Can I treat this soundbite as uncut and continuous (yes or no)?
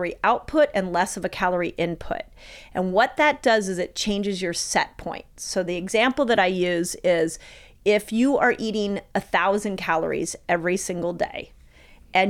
yes